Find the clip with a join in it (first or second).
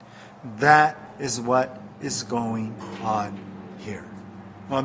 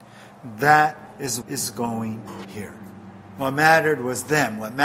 second